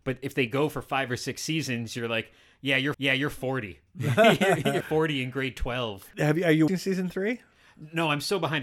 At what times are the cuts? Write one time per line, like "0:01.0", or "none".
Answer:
0:02.9
0:04.8
0:06.1
0:06.7